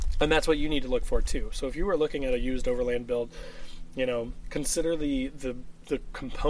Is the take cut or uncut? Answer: uncut